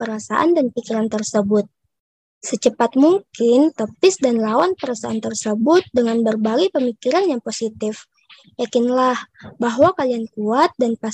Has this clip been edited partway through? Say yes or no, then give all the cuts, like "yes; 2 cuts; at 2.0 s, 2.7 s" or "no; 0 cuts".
no; 0 cuts